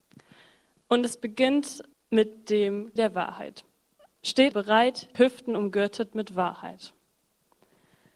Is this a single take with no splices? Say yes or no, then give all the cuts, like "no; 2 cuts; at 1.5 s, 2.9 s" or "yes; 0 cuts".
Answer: no; 4 cuts; at 1.9 s, 3.0 s, 4.5 s, 5.1 s